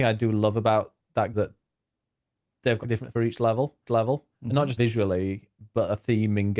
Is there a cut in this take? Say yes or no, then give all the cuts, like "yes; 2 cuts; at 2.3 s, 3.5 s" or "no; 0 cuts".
yes; 5 cuts; at 1.3 s, 2.8 s, 3.1 s, 3.9 s, 4.8 s